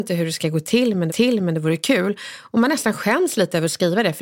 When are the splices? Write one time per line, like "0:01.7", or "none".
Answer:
0:01.1